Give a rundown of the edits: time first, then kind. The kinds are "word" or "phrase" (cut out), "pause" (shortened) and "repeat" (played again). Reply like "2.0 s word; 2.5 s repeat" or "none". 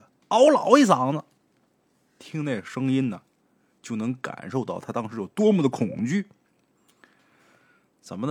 none